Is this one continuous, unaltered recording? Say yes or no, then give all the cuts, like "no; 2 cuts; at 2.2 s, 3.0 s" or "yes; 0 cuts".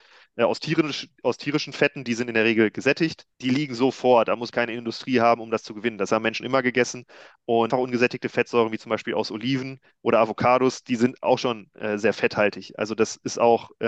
no; 5 cuts; at 3.3 s, 4.5 s, 6.4 s, 7.7 s, 11.2 s